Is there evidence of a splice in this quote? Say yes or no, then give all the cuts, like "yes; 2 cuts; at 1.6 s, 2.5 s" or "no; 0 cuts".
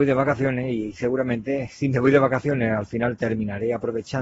no; 0 cuts